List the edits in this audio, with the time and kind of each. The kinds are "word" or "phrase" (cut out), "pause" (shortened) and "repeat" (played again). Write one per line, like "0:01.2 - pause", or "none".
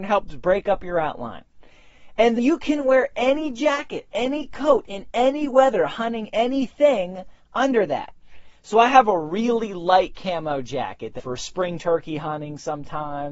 0:02.4 - word
0:11.2 - phrase